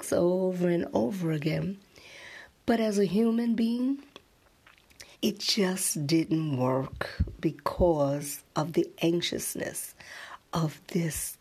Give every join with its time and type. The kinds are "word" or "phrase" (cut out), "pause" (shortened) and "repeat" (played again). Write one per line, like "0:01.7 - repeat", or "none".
0:05.1 - pause